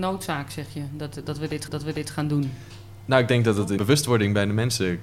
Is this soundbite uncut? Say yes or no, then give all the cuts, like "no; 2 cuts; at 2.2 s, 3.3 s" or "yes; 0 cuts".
no; 2 cuts; at 1.7 s, 3.8 s